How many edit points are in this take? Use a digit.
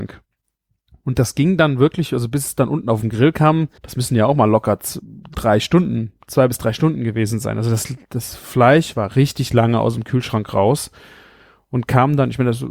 1